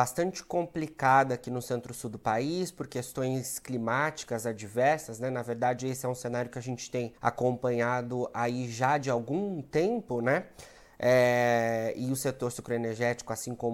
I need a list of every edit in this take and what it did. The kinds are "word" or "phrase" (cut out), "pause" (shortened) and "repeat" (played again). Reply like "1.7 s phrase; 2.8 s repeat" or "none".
7.2 s pause